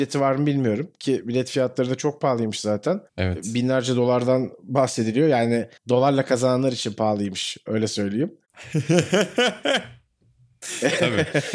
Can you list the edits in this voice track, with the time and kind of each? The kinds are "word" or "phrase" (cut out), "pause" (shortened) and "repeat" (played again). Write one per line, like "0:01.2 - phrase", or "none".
0:03.1 - pause
0:05.8 - pause